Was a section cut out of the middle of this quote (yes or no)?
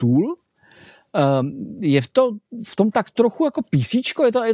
no